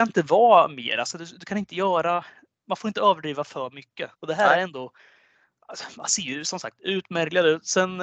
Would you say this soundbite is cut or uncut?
cut